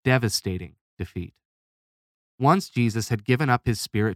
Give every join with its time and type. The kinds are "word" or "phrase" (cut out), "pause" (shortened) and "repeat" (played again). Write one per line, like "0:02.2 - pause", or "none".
none